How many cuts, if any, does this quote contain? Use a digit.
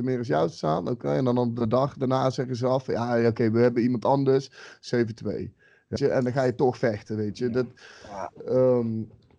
1